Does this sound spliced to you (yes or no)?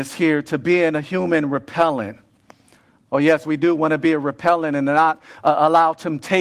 no